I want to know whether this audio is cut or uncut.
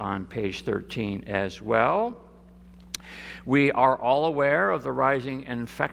uncut